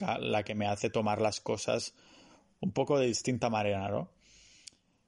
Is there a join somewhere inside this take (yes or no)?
no